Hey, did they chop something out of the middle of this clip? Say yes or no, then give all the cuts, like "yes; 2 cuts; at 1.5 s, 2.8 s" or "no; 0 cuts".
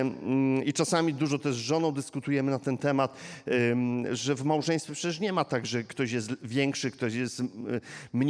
no; 0 cuts